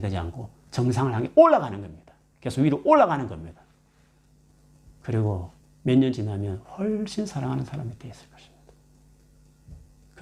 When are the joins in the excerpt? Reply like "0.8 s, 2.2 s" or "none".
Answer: 2.3 s, 5.6 s